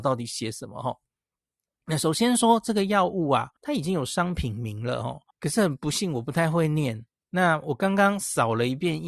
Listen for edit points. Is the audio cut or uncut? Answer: cut